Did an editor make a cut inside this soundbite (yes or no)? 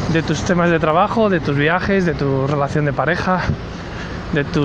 no